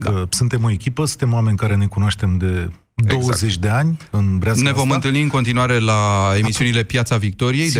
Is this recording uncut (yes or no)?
yes